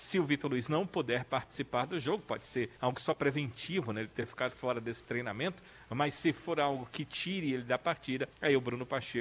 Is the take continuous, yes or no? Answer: no